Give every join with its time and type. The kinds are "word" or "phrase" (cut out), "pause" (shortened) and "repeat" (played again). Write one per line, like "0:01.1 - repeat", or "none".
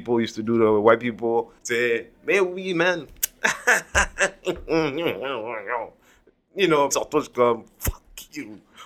0:01.6 - pause
0:06.9 - word